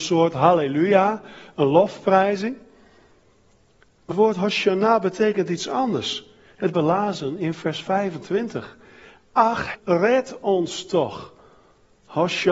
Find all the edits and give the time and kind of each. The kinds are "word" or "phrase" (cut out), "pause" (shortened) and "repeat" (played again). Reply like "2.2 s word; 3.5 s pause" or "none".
4.1 s word; 6.7 s phrase; 9.7 s word